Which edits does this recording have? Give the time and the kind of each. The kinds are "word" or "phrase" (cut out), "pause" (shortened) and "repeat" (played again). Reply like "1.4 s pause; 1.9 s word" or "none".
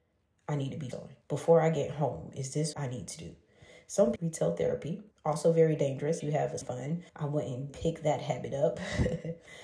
0.9 s word; 1.2 s pause; 2.7 s word; 4.2 s phrase; 5.1 s pause; 6.2 s word; 6.6 s word; 7.1 s pause; 7.7 s word